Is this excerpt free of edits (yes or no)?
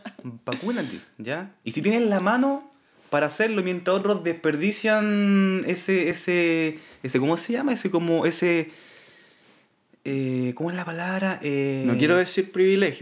yes